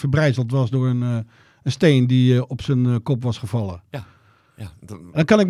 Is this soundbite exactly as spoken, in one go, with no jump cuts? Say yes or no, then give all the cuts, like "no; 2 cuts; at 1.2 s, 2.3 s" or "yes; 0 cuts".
yes; 0 cuts